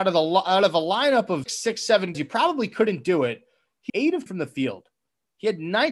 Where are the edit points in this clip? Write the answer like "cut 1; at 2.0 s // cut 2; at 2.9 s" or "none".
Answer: cut 1; at 1.5 s // cut 2; at 2.1 s // cut 3; at 3.9 s // cut 4; at 4.3 s